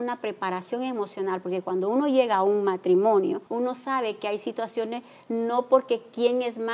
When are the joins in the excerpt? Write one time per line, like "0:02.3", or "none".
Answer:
0:03.5